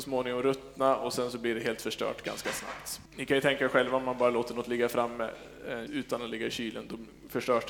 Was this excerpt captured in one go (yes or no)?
no